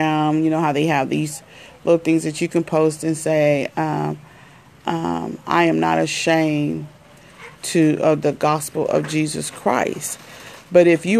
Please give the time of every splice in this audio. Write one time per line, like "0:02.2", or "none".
none